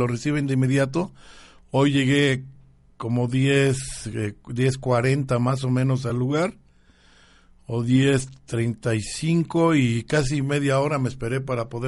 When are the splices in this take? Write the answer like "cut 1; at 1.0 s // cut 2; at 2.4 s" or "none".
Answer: none